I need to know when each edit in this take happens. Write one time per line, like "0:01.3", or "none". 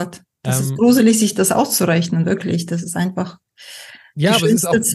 none